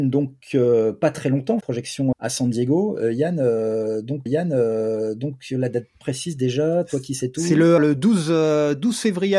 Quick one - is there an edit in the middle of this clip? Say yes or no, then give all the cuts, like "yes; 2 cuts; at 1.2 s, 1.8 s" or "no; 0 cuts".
yes; 4 cuts; at 1.6 s, 2.1 s, 4.3 s, 7.8 s